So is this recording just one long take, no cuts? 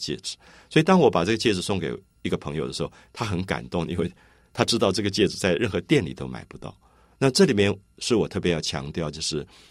yes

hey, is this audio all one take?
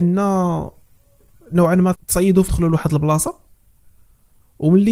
no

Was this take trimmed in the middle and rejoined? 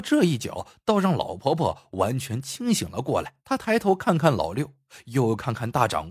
yes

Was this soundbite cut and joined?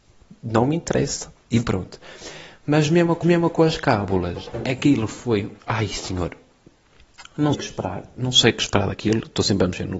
yes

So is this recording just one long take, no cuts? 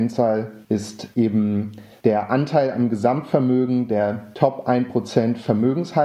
yes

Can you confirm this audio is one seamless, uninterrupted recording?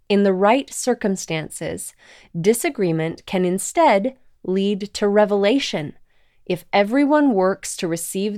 yes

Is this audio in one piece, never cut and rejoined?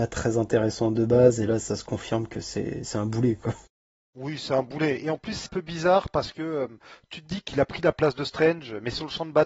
no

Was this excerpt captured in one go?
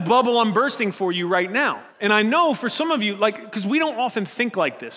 no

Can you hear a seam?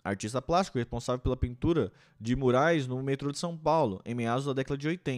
no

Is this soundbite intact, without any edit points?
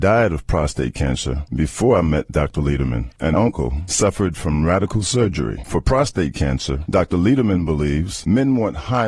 no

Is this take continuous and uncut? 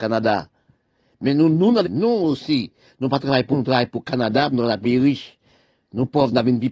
no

